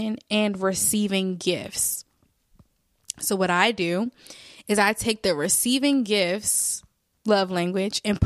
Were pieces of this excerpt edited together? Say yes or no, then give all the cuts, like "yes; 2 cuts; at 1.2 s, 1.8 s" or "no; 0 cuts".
no; 0 cuts